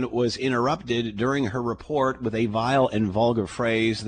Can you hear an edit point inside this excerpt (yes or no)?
no